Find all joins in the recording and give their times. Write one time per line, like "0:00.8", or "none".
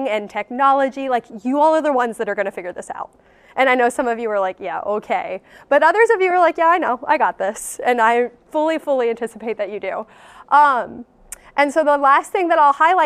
none